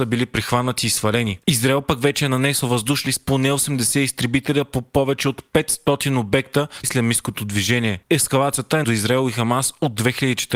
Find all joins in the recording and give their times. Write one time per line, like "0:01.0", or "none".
0:01.4
0:03.1
0:06.8
0:08.0
0:08.8